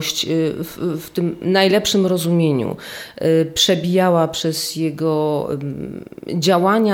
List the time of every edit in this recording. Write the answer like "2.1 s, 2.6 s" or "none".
none

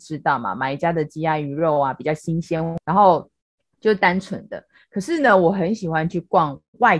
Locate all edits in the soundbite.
none

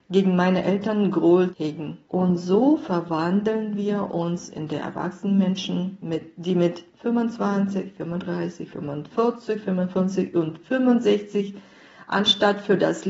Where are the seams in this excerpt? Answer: 1.5 s, 2.0 s

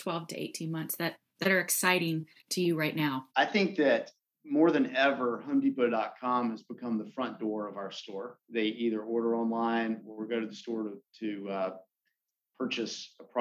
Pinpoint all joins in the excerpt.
3.3 s, 8.4 s

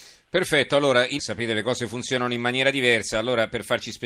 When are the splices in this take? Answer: 1.2 s

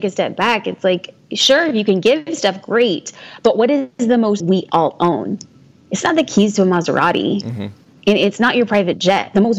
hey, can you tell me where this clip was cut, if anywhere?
4.4 s

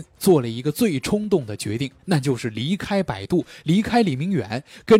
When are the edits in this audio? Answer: none

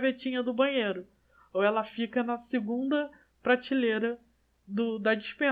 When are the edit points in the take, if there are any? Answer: none

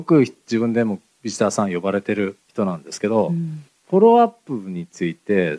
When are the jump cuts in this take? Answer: 2.4 s, 3.7 s

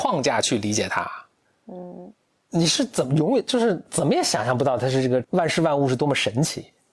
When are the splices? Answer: none

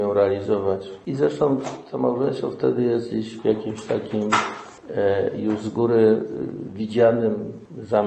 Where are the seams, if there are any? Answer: none

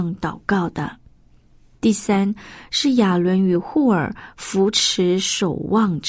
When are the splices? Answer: none

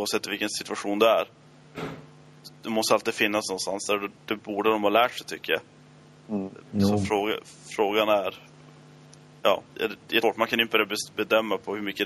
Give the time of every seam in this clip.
6.6 s, 9.7 s, 10.2 s

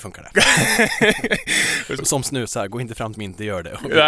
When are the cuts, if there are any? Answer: 2.0 s, 3.1 s

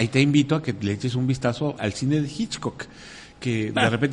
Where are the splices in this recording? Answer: 1.8 s

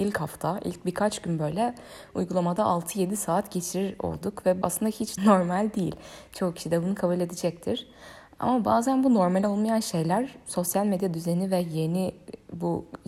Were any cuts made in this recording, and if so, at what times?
4.6 s, 5.2 s

